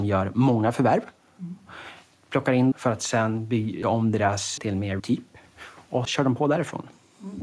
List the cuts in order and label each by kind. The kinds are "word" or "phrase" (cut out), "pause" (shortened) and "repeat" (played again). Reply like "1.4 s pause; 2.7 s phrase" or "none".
2.7 s word; 3.8 s word; 4.6 s word; 5.0 s word; 6.0 s word